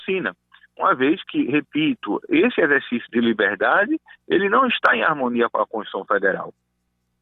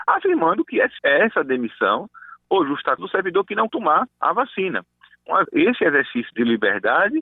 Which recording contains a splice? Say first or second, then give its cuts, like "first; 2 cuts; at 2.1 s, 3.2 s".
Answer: second; 5 cuts; at 1.0 s, 3.0 s, 3.7 s, 4.1 s, 5.4 s